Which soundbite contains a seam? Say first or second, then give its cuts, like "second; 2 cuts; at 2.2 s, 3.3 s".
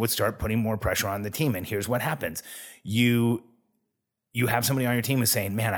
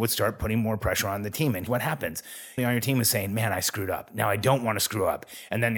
second; 2 cuts; at 1.7 s, 2.6 s